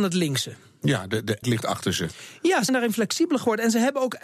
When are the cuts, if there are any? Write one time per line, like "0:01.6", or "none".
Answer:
0:01.4
0:02.7